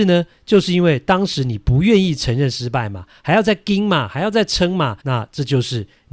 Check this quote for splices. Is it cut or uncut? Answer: cut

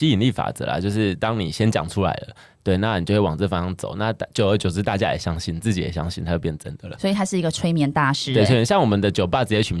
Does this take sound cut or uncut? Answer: uncut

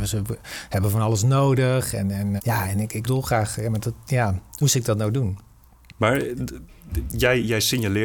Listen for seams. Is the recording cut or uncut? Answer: cut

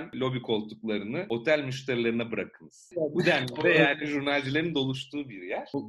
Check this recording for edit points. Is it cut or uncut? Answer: uncut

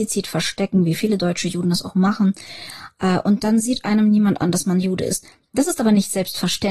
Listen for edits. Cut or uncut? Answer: uncut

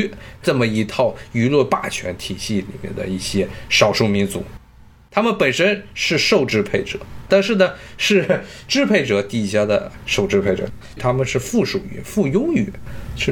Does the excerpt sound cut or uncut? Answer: uncut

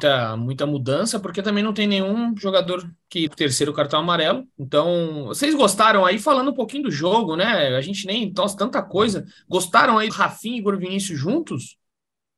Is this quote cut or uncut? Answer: cut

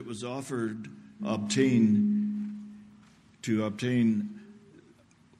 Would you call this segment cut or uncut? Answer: cut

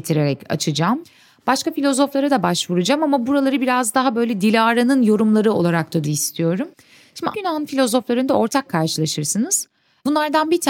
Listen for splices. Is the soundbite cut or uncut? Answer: cut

